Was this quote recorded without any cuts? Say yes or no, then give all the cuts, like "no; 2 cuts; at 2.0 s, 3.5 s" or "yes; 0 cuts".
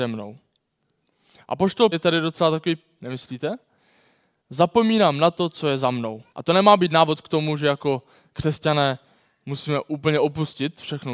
no; 3 cuts; at 1.9 s, 3.0 s, 6.3 s